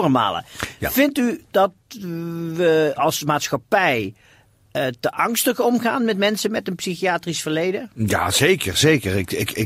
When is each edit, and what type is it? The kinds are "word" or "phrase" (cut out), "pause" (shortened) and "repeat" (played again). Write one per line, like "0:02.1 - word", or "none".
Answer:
none